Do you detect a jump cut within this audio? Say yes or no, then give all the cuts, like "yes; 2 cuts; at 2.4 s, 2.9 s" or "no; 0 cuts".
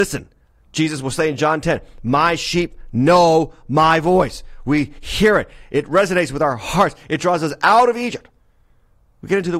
no; 0 cuts